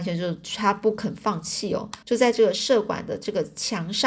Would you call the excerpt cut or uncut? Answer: cut